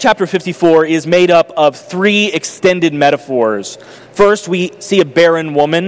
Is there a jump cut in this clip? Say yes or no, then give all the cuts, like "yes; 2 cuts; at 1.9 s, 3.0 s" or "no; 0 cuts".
no; 0 cuts